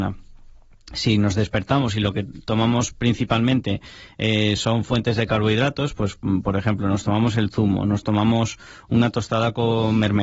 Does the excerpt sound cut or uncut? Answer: uncut